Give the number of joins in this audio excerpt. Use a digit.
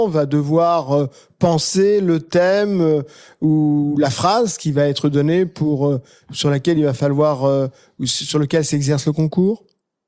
0